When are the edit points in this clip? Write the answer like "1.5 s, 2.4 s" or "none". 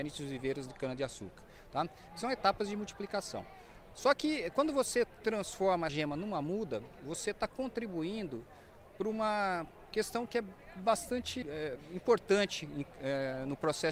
5.9 s, 11.4 s